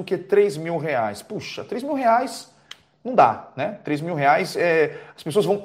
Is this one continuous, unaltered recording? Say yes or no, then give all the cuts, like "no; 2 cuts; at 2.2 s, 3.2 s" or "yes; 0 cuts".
yes; 0 cuts